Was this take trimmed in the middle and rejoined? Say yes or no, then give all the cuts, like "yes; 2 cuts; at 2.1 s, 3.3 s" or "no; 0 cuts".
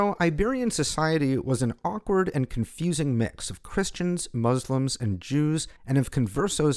yes; 1 cut; at 5.8 s